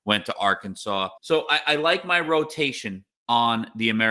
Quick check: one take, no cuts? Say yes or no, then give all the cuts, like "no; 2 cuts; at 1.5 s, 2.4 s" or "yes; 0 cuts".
no; 2 cuts; at 1.2 s, 3.1 s